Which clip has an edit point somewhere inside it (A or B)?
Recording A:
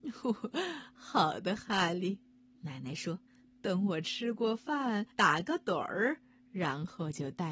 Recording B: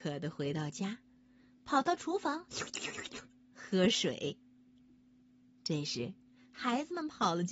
A